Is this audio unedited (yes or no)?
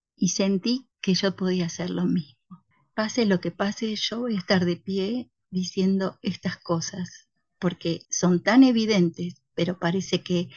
no